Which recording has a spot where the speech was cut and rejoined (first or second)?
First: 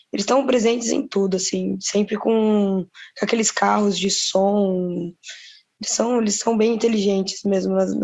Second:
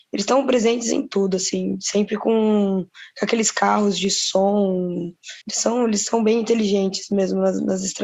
second